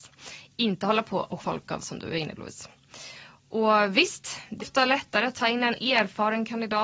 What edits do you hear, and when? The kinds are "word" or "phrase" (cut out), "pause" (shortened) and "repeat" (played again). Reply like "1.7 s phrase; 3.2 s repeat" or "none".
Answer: 1.4 s word; 1.8 s word; 2.4 s word; 4.6 s word